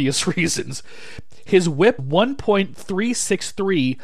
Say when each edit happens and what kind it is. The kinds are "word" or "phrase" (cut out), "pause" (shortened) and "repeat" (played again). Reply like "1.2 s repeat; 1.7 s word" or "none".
2.0 s word